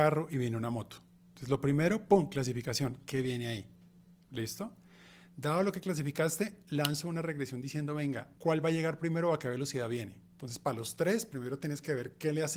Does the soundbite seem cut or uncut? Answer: uncut